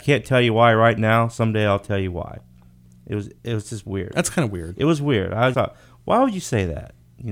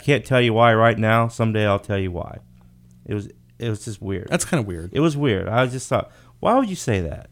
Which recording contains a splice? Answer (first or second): first